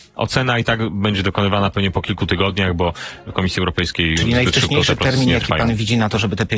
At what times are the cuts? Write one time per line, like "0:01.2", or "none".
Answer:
none